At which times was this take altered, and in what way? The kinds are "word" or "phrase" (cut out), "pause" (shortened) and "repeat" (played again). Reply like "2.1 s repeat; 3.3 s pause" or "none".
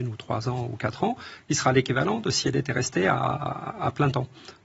none